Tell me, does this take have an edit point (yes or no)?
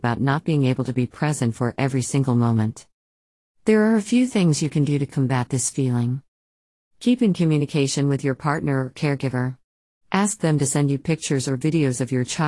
no